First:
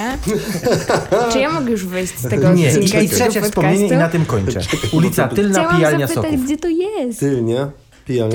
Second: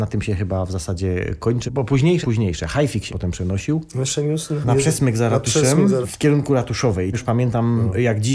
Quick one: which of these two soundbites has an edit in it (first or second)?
second